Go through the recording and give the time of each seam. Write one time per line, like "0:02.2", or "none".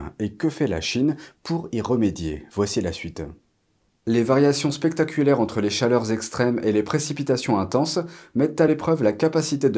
none